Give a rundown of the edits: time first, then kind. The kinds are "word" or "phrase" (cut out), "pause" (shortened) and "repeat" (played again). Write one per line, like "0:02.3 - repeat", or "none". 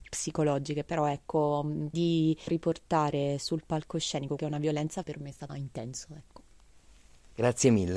0:01.9 - word
0:02.5 - word
0:04.4 - word
0:05.0 - word
0:05.5 - word